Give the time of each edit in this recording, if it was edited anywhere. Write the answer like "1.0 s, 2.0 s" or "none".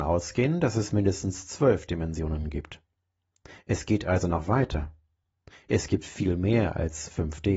none